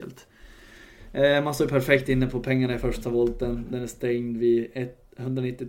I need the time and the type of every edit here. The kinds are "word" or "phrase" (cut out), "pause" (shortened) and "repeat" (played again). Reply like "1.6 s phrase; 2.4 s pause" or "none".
none